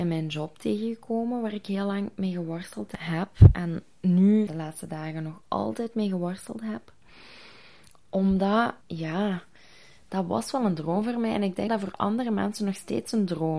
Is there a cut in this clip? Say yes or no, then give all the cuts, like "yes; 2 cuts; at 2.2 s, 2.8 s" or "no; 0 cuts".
yes; 3 cuts; at 4.5 s, 8.8 s, 11.7 s